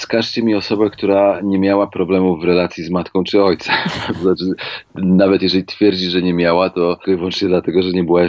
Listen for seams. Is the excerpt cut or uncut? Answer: uncut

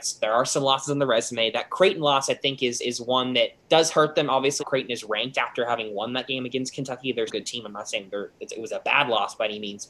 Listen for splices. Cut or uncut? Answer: cut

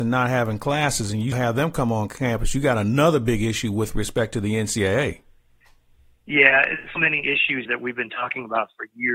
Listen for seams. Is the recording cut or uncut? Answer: cut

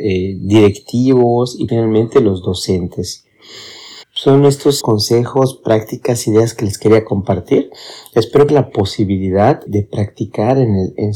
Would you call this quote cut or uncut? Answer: cut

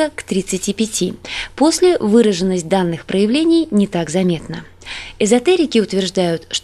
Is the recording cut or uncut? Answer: uncut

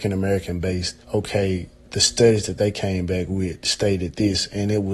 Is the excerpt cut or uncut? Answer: cut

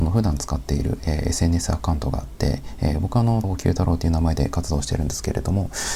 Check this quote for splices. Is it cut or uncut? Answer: cut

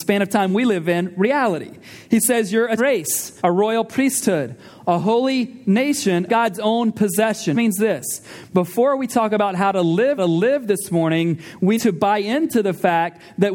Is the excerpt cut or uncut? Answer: cut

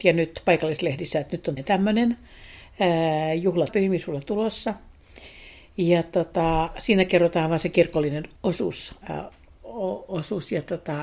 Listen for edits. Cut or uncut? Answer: cut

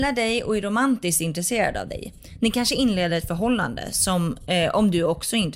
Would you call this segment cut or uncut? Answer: uncut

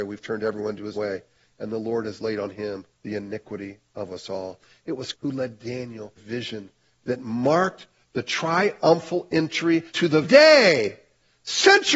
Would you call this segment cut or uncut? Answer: cut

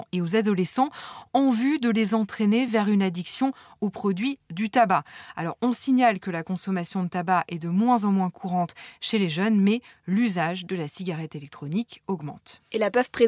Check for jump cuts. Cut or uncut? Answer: uncut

